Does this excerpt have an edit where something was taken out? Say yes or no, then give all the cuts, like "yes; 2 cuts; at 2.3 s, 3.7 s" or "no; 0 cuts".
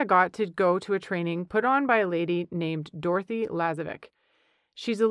no; 0 cuts